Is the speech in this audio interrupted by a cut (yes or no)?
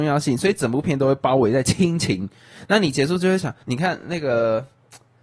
yes